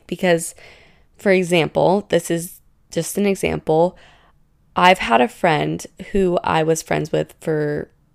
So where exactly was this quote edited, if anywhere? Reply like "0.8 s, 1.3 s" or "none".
none